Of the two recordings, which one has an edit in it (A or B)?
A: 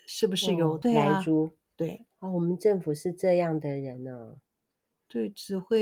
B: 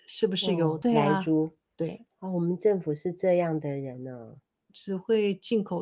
B